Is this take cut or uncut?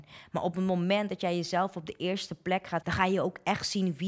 cut